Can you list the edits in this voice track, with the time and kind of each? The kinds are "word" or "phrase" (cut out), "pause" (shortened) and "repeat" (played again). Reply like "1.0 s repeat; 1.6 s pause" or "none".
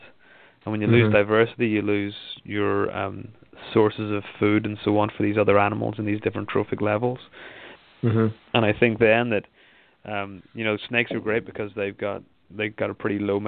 none